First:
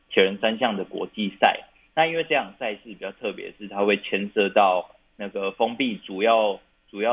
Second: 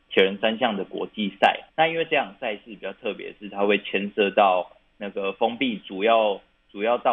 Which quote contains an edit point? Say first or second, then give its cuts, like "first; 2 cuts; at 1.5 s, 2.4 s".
second; 1 cut; at 1.7 s